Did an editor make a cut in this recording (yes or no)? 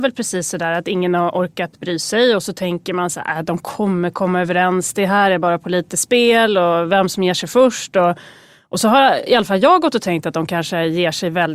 no